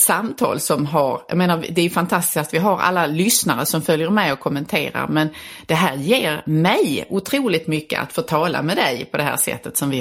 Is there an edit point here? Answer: no; 0 cuts

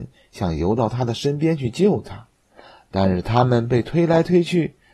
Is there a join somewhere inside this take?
no; 0 cuts

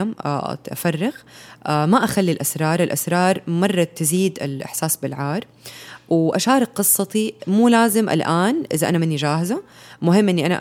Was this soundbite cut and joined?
no; 0 cuts

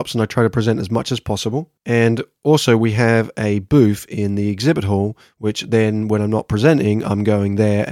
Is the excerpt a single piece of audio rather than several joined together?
no; 1 cut; at 1.8 s

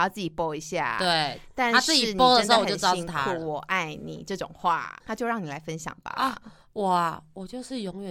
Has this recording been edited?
no; 0 cuts

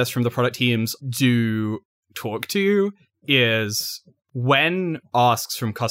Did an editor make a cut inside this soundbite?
yes; 1 cut; at 1.0 s

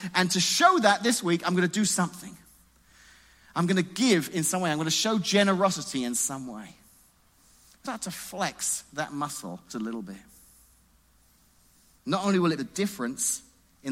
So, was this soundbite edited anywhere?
yes; 3 cuts; at 7.8 s, 9.7 s, 12.6 s

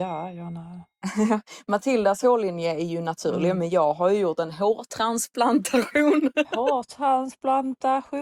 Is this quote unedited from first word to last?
yes; 0 cuts

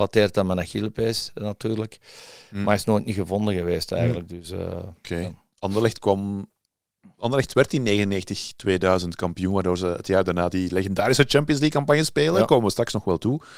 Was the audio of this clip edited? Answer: no; 0 cuts

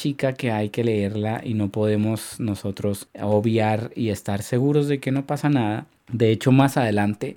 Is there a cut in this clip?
no; 0 cuts

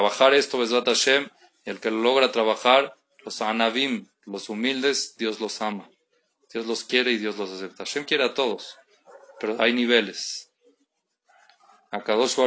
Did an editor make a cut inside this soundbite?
no; 0 cuts

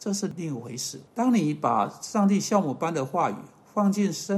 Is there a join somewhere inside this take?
yes; 1 cut; at 1.1 s

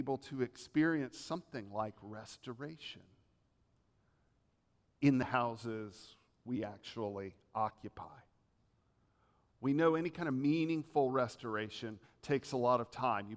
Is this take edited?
no; 0 cuts

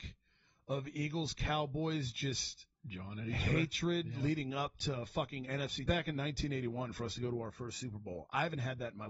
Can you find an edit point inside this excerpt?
yes; 2 cuts; at 2.8 s, 5.9 s

